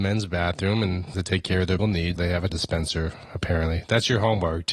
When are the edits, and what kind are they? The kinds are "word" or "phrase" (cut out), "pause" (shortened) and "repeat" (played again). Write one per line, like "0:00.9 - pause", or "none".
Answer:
0:01.1 - phrase
0:01.8 - word
0:02.2 - word
0:02.5 - word